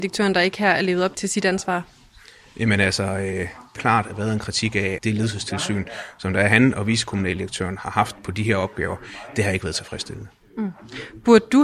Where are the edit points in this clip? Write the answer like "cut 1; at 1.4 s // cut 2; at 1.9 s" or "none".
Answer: cut 1; at 1.1 s // cut 2; at 3.8 s // cut 3; at 5.0 s